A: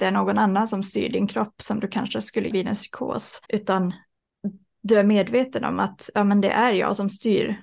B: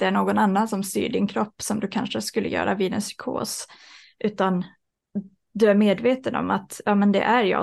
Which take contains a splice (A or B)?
A